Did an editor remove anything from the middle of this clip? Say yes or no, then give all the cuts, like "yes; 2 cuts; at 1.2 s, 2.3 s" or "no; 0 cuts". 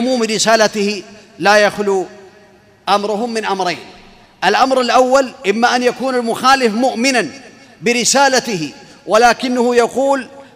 no; 0 cuts